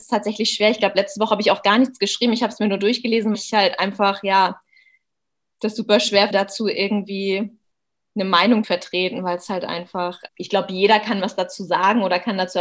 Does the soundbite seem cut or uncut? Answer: cut